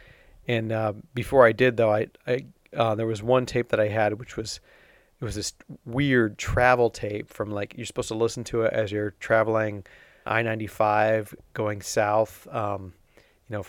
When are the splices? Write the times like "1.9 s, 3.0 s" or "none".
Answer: 10.3 s